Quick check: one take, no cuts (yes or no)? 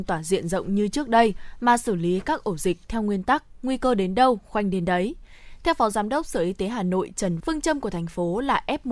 no